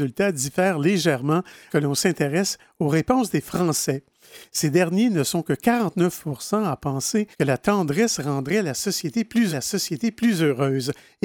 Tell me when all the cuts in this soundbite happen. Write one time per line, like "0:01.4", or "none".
0:01.7
0:07.3
0:09.5

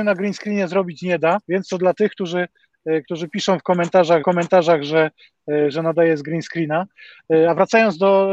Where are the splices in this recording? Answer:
0:01.4
0:04.2

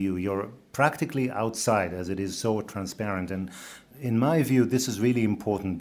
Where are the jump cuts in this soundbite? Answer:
none

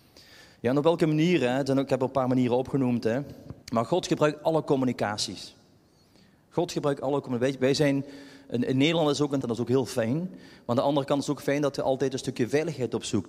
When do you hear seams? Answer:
0:03.6
0:09.4

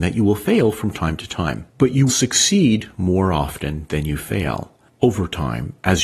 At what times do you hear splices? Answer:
0:01.7
0:02.1

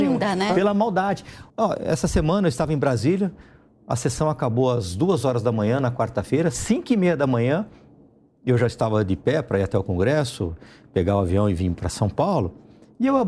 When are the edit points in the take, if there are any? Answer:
0:01.5

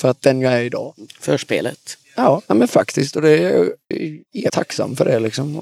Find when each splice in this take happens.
0:03.9
0:04.5

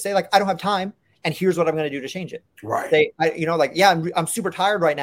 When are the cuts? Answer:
0:02.5

